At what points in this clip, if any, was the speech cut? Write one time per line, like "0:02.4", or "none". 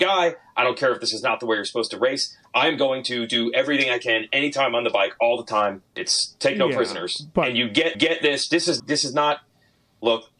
0:05.9
0:07.9
0:08.8